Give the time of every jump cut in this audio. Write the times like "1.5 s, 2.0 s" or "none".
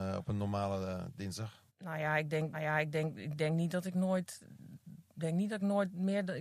1.7 s, 2.5 s, 5.1 s